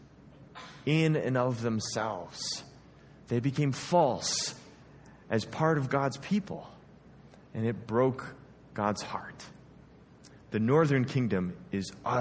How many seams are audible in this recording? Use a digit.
0